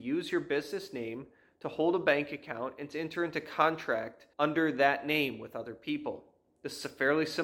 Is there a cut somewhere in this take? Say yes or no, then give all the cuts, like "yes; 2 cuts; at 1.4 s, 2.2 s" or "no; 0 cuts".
yes; 1 cut; at 4.3 s